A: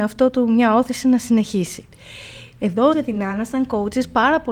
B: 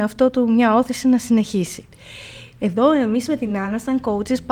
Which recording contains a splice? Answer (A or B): A